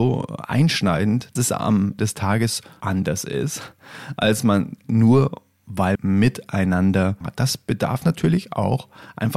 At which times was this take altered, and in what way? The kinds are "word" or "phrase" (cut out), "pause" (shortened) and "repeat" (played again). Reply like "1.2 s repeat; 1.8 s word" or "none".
1.4 s word; 2.0 s word; 2.8 s word; 4.8 s word; 5.9 s word; 7.2 s word